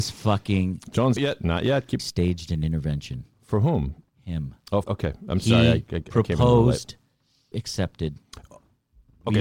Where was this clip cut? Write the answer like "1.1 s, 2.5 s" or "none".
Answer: 1.2 s, 2.0 s, 3.3 s, 4.1 s, 4.8 s, 7.5 s